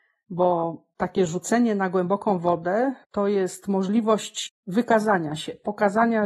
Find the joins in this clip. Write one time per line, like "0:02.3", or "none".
0:03.0